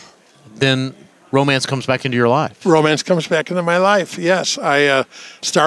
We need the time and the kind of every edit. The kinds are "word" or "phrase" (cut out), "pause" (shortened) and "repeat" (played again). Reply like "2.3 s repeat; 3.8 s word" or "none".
none